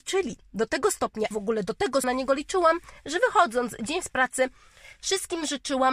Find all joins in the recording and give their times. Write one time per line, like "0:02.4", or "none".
0:01.3
0:02.0
0:04.0